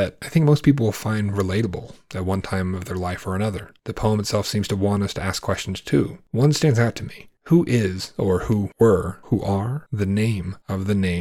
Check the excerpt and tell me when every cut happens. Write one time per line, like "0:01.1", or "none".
none